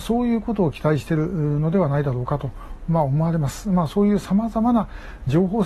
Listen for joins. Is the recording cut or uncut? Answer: uncut